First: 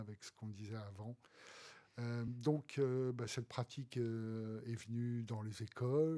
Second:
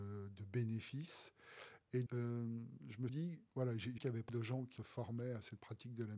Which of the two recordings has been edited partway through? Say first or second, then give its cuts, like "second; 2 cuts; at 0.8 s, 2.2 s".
second; 6 cuts; at 2.1 s, 3.1 s, 3.5 s, 4.0 s, 4.3 s, 4.8 s